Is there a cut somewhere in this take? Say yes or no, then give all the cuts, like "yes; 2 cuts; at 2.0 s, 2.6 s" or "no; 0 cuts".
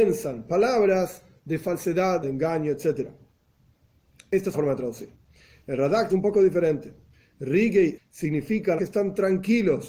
yes; 5 cuts; at 2.2 s, 4.5 s, 6.1 s, 8.0 s, 8.8 s